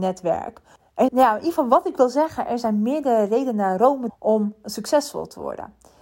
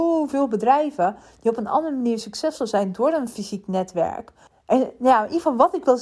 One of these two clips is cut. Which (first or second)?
first